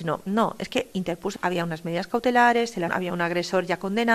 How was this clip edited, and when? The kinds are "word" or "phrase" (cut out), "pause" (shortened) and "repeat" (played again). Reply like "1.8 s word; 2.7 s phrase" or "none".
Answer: 1.4 s word; 2.9 s word